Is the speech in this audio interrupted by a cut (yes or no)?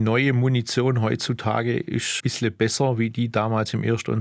yes